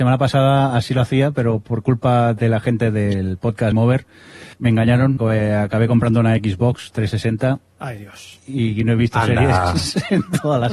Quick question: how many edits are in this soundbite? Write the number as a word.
three